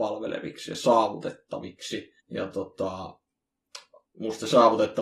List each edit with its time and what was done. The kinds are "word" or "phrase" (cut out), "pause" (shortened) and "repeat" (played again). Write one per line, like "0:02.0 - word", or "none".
0:02.2 - pause
0:04.1 - pause